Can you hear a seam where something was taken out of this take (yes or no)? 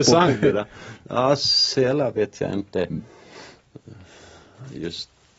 no